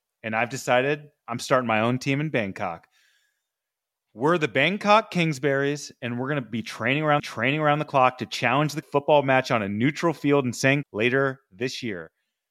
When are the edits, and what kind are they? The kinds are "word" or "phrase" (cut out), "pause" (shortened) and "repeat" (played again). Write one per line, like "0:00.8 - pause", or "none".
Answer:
0:07.2 - repeat
0:08.8 - phrase
0:10.8 - word